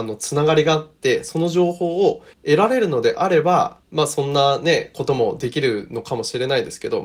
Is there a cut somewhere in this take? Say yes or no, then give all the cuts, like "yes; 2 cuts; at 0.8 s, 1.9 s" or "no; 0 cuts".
yes; 2 cuts; at 2.3 s, 3.8 s